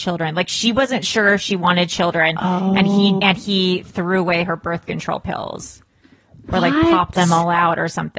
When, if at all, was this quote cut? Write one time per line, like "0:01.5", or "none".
0:03.2